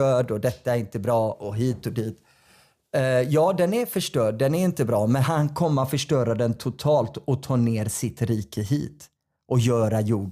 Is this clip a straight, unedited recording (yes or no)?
yes